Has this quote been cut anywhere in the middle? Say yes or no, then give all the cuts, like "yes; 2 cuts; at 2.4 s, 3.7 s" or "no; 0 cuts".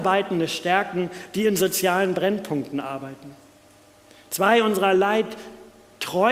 no; 0 cuts